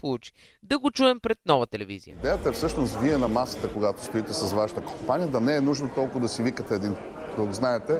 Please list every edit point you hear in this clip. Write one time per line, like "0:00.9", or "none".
none